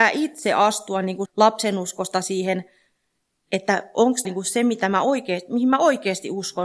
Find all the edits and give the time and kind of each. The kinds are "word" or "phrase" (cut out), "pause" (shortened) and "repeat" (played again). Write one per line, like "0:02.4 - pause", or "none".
0:01.2 - word
0:04.2 - word

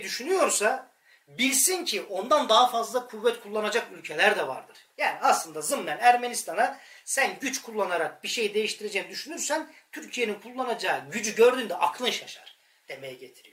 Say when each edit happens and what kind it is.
none

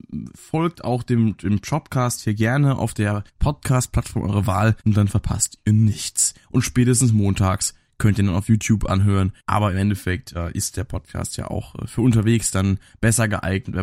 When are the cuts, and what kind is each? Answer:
0:03.3 - pause
0:04.8 - pause
0:09.4 - pause

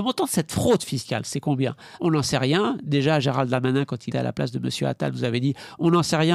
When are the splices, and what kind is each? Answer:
0:02.0 - word
0:04.1 - word

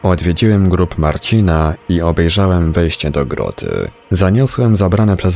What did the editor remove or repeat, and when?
none

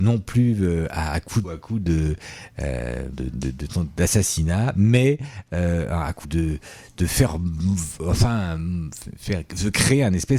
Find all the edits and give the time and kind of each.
0:01.4 - phrase
0:03.1 - word
0:06.2 - word

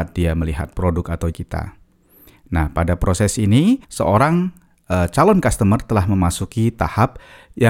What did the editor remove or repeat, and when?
0:01.3 - word
0:03.8 - pause

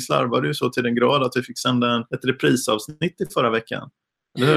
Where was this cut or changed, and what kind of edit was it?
0:02.1 - pause

